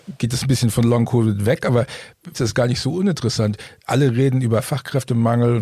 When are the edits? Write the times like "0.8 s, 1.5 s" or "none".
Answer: 2.3 s